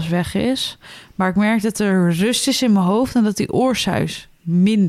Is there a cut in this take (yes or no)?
no